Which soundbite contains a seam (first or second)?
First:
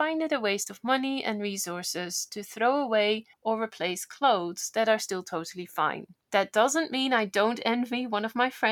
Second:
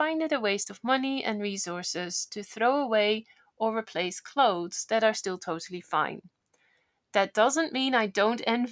first